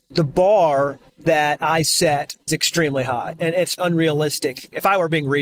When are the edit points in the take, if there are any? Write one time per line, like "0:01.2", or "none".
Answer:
0:01.1
0:02.5
0:03.4
0:03.8